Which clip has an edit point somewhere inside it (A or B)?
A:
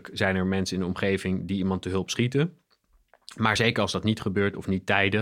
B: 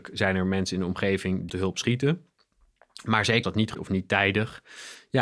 B